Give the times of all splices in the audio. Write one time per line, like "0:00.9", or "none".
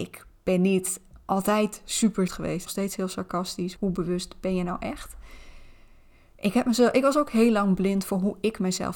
0:01.2
0:02.3
0:02.7
0:03.8